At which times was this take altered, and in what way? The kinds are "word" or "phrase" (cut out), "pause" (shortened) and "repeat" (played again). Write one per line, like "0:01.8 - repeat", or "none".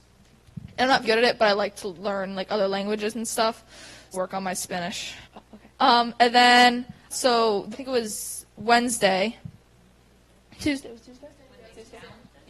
0:01.0 - word
0:04.1 - phrase
0:05.2 - pause
0:05.7 - pause
0:07.1 - word
0:07.7 - phrase